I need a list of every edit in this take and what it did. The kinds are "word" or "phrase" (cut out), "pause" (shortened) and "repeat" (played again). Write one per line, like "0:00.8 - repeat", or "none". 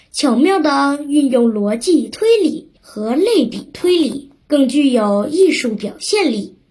0:02.8 - pause
0:04.4 - pause

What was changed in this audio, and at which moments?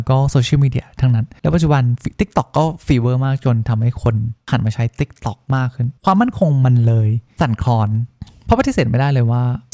0:06.0 - pause

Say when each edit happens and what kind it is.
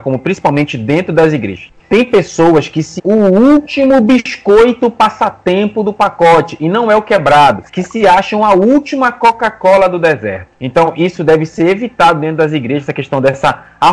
0:03.0 - word
0:07.7 - pause

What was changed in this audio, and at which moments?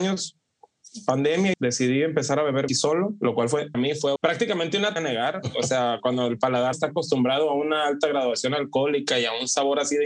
0:01.5 - phrase
0:02.7 - word
0:03.7 - phrase
0:04.2 - word
0:05.0 - phrase
0:06.7 - word

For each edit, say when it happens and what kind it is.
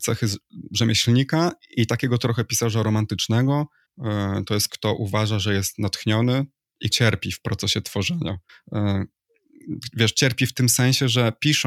0:03.9 - pause
0:04.7 - word
0:06.9 - word
0:08.5 - pause

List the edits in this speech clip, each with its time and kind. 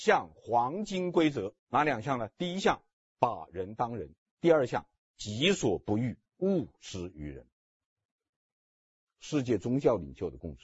0:01.6 - pause
0:06.3 - pause

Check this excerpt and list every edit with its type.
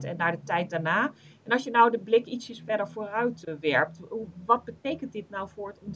none

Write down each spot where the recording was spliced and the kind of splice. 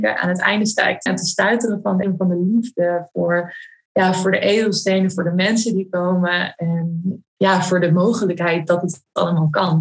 0:01.1 - word
0:02.0 - word
0:07.3 - word

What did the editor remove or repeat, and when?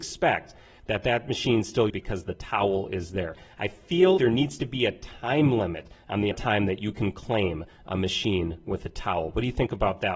0:01.9 - word
0:04.2 - word
0:06.3 - word

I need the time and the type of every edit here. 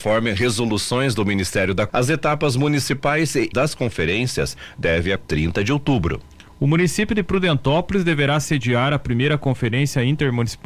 0:01.9 - word
0:03.5 - word
0:05.2 - phrase

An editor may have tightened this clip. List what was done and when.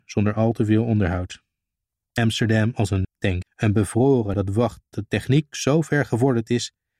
0:03.0 - word
0:03.4 - word
0:04.3 - word
0:04.9 - word

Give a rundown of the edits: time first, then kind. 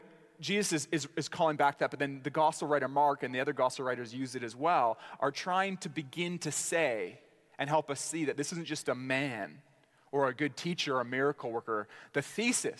none

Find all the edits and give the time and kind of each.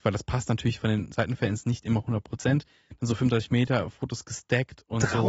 none

